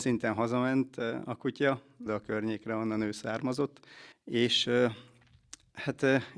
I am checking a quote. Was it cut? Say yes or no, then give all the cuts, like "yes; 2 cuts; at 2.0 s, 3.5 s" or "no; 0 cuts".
yes; 2 cuts; at 2.1 s, 4.1 s